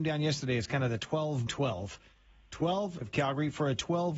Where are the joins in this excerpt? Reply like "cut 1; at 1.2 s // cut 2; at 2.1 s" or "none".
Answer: cut 1; at 1.5 s // cut 2; at 3.0 s